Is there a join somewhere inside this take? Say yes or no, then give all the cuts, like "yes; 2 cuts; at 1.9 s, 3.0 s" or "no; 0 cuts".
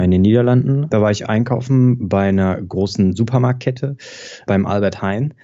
no; 0 cuts